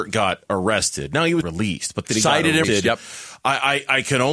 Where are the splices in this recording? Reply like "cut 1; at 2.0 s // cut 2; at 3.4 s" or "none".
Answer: cut 1; at 1.4 s // cut 2; at 2.0 s // cut 3; at 2.6 s